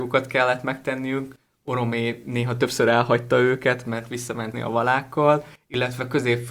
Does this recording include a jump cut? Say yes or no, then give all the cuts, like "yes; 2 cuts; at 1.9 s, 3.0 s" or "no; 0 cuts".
yes; 1 cut; at 4.5 s